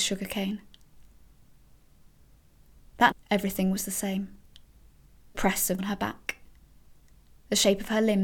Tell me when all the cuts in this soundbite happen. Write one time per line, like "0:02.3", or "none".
0:03.1
0:05.3
0:05.8